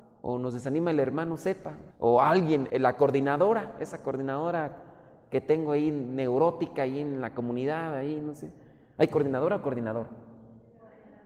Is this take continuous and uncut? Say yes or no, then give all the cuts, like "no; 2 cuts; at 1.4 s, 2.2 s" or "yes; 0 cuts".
no; 2 cuts; at 1.9 s, 2.7 s